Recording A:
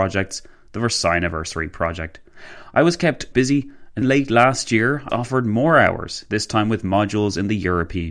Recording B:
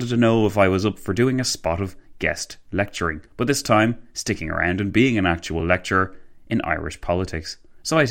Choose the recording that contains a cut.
A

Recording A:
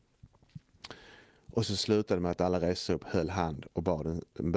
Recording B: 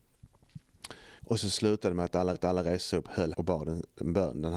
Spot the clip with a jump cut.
B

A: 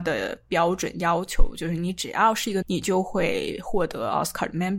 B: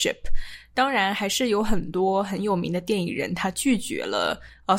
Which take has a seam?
A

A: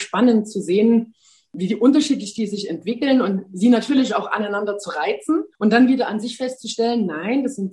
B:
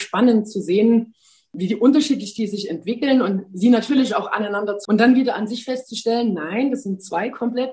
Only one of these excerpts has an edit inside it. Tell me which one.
B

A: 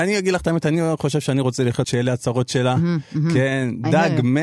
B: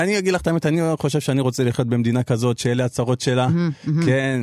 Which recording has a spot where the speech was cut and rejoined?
A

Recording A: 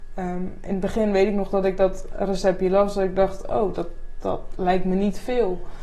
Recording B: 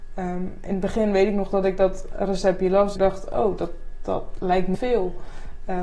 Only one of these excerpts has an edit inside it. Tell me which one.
B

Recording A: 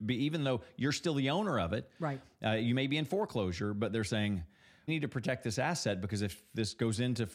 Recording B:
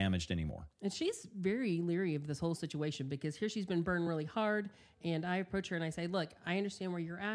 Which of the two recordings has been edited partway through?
A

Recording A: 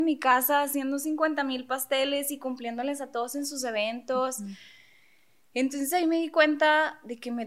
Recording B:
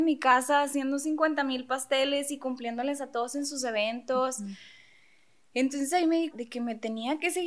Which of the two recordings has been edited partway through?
B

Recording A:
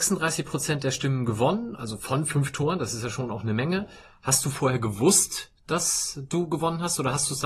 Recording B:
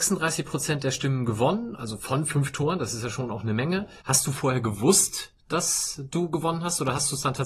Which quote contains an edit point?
B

